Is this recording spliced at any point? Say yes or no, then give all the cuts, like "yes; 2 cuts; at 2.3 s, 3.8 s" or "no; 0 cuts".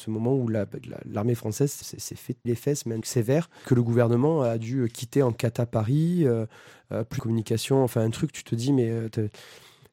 yes; 5 cuts; at 1.8 s, 2.4 s, 3.0 s, 3.6 s, 7.2 s